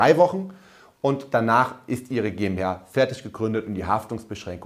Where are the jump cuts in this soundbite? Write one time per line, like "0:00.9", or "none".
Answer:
none